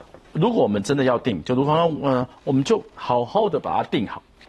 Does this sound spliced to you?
no; 0 cuts

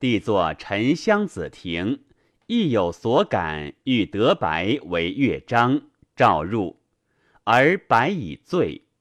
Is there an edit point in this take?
no; 0 cuts

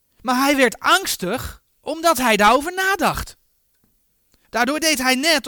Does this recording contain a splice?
no; 0 cuts

